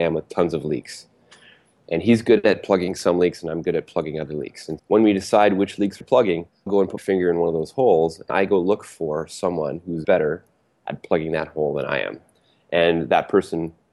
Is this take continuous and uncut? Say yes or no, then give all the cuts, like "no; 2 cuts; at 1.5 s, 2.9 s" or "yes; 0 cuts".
no; 6 cuts; at 4.8 s, 6.0 s, 6.7 s, 7.0 s, 8.3 s, 10.0 s